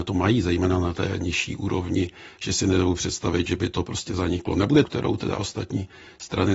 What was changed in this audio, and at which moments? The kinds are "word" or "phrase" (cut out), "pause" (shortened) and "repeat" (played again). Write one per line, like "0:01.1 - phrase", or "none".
0:04.8 - phrase